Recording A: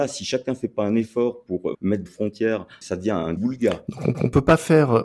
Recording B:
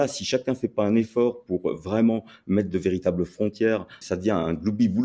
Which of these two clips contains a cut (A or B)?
A